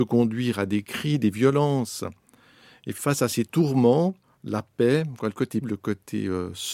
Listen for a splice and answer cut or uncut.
cut